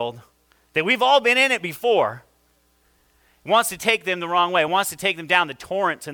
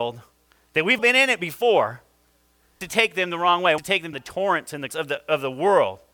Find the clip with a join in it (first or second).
second